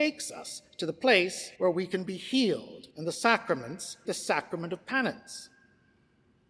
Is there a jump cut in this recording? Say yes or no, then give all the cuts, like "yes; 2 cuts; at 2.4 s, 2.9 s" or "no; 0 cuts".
yes; 3 cuts; at 1.5 s, 2.9 s, 4.0 s